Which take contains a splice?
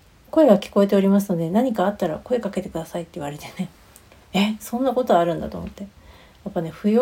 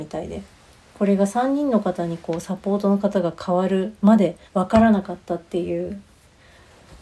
second; 1 cut; at 4.5 s

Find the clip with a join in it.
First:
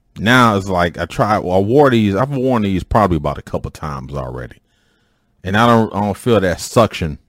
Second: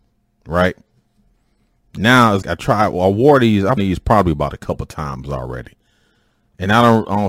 second; 2 cuts; at 2.4 s, 3.8 s

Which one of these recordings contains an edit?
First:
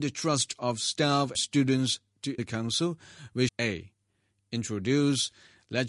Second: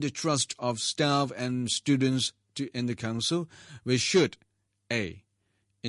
first; 3 cuts; at 1.3 s, 2.4 s, 3.5 s

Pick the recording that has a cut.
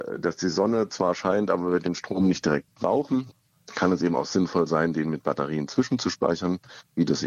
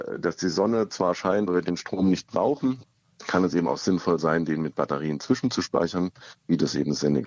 second; 2 cuts; at 1.5 s, 2.2 s

